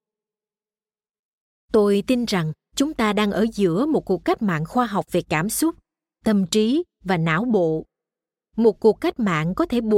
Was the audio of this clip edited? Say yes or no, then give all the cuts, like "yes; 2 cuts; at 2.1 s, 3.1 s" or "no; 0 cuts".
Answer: no; 0 cuts